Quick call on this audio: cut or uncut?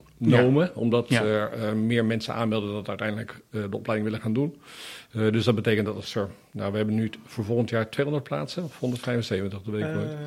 uncut